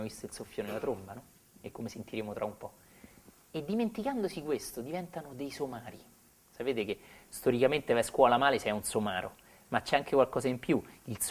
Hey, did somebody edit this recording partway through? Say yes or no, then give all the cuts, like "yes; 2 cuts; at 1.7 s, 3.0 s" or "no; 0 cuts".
no; 0 cuts